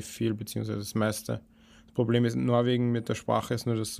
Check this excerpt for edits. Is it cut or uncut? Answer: uncut